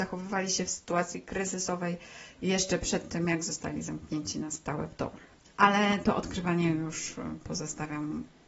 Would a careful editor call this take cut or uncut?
uncut